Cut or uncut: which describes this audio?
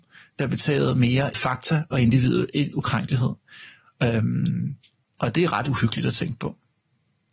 cut